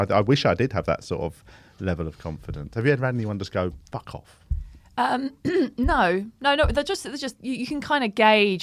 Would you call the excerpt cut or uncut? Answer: uncut